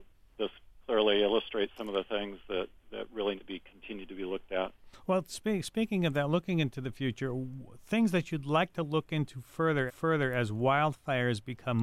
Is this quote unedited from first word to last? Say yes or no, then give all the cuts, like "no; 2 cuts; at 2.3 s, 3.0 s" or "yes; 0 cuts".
no; 2 cuts; at 3.4 s, 9.9 s